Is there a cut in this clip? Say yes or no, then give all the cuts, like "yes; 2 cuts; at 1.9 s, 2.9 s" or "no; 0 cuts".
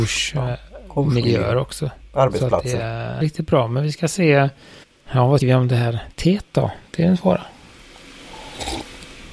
yes; 3 cuts; at 3.2 s, 4.8 s, 5.4 s